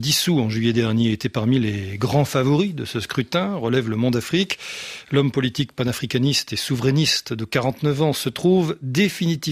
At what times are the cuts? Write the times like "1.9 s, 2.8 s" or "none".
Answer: none